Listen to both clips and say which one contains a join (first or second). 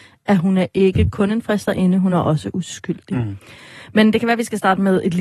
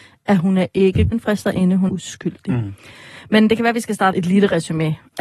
second